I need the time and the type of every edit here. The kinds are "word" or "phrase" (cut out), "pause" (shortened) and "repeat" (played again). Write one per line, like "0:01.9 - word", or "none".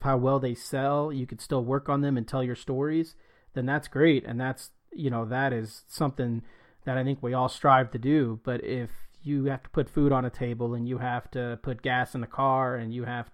none